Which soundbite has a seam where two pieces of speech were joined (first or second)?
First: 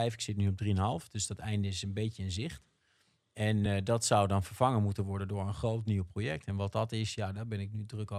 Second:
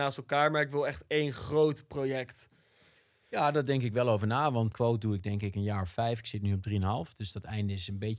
second